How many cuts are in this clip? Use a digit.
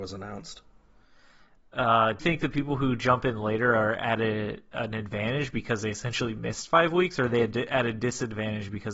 1